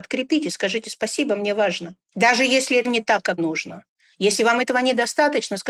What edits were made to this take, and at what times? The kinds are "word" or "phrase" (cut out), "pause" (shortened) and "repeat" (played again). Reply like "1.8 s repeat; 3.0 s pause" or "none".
2.0 s pause; 2.8 s word; 3.4 s word